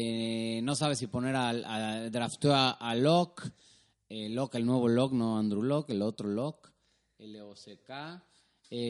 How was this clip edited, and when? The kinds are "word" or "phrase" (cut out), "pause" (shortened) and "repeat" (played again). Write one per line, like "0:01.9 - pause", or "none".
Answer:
none

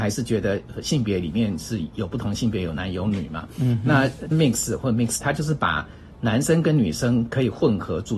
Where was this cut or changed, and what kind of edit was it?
0:04.3 - word
0:05.2 - word

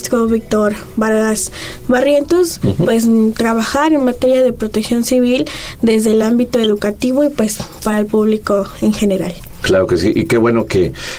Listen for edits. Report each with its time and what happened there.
none

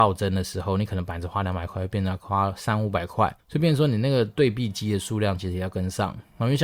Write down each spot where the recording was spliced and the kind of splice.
0:03.4 - pause

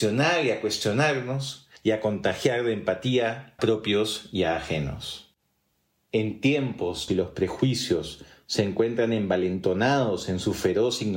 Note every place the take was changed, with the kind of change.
0:01.8 - pause
0:03.6 - word
0:07.1 - phrase

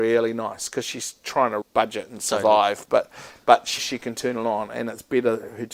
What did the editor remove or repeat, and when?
0:01.6 - word
0:03.8 - word

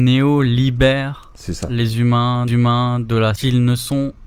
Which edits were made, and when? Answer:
0:02.5 - repeat
0:03.4 - phrase

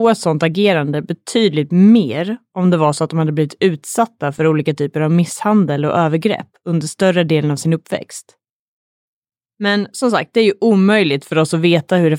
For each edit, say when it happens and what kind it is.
none

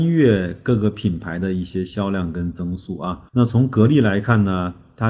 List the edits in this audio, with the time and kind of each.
0:03.3 - pause

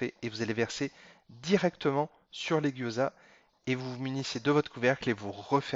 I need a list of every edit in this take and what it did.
none

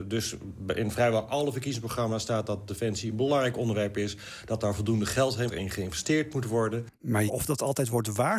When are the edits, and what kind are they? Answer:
0:05.5 - phrase
0:07.3 - word

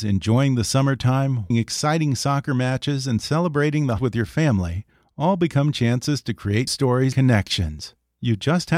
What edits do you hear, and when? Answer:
0:01.5 - word
0:04.0 - word
0:06.7 - word
0:07.1 - word

